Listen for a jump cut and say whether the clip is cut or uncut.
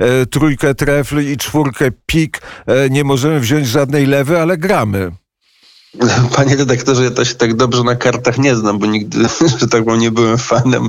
uncut